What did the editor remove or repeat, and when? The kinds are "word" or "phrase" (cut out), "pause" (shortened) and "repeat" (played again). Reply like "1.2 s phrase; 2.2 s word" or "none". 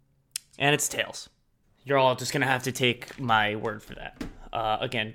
1.6 s pause